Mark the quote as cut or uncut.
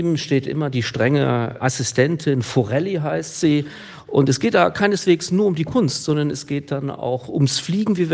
uncut